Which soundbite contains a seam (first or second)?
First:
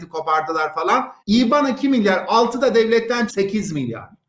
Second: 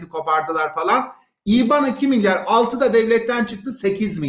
first